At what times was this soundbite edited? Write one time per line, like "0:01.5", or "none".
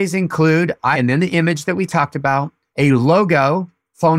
0:00.9